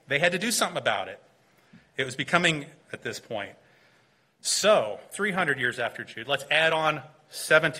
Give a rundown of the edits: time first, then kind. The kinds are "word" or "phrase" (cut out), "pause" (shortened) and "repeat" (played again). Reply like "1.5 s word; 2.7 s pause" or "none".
2.8 s phrase; 5.1 s word